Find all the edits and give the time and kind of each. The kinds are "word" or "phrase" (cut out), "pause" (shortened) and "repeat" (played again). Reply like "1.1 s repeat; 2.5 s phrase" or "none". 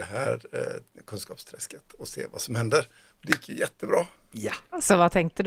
none